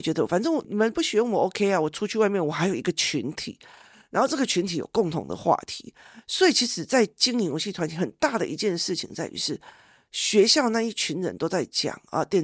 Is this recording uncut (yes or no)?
yes